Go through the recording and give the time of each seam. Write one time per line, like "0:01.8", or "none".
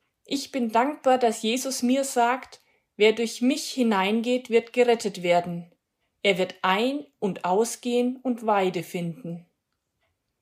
none